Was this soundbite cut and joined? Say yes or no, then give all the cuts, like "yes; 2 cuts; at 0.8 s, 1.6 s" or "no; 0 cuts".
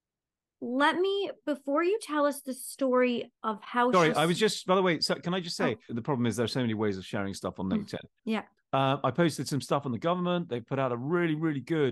yes; 2 cuts; at 3.4 s, 8.2 s